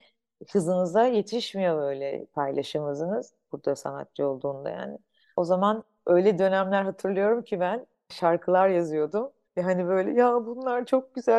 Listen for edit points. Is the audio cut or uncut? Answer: uncut